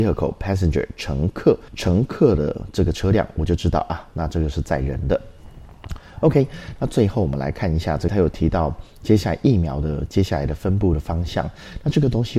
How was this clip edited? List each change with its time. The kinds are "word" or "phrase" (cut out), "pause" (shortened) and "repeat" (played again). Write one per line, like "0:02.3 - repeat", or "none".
0:01.7 - pause
0:08.1 - phrase

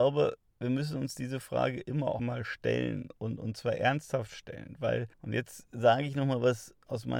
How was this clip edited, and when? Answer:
0:02.2 - word
0:05.1 - pause

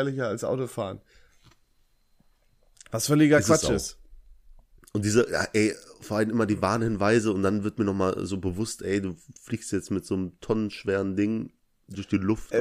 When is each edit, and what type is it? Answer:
none

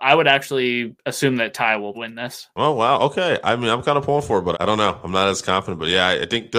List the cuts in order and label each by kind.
0:01.9 - word
0:04.5 - word

